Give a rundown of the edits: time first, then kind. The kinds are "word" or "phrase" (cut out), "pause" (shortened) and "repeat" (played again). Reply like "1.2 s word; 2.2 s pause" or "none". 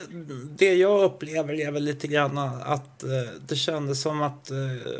none